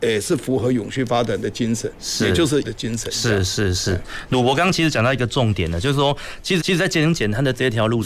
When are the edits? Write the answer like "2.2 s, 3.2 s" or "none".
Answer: 2.6 s, 6.6 s